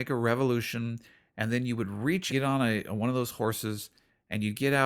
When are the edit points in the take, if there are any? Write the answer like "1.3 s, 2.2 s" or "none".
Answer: 2.3 s